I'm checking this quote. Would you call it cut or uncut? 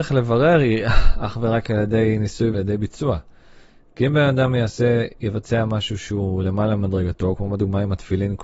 cut